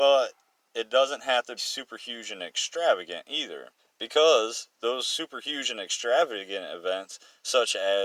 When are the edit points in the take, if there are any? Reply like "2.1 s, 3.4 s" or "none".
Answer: 1.6 s, 3.8 s

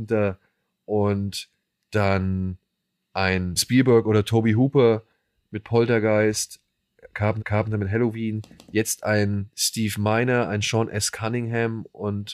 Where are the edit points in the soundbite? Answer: 3.6 s, 7.4 s

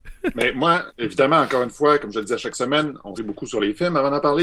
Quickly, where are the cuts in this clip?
3.1 s

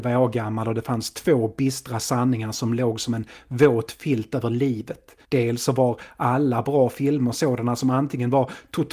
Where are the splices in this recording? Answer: 5.2 s

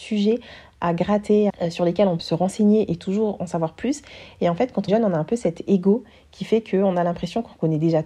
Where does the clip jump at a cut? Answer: 1.5 s, 2.2 s, 4.9 s

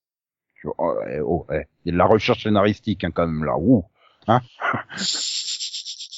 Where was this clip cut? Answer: none

